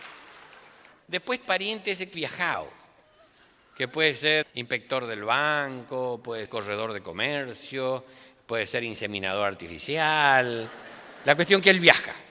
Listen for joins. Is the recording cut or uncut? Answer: cut